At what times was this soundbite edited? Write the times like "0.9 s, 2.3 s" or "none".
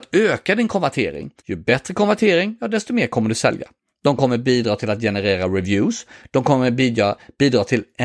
1.4 s